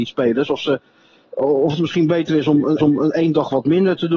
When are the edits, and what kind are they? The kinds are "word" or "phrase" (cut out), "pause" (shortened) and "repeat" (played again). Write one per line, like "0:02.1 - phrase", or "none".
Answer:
0:02.8 - repeat